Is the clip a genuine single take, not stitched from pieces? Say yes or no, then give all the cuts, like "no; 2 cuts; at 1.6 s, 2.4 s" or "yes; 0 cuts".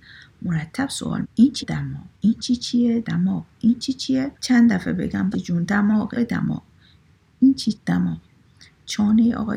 no; 8 cuts; at 1.2 s, 1.6 s, 2.1 s, 3.0 s, 4.4 s, 5.3 s, 6.1 s, 7.7 s